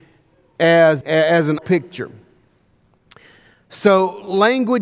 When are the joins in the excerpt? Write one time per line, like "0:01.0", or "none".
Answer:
0:01.0
0:01.6